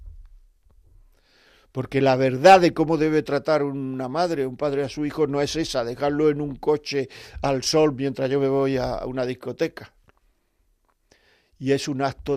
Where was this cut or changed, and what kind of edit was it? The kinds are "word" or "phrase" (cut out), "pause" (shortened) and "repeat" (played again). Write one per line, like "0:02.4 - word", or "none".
none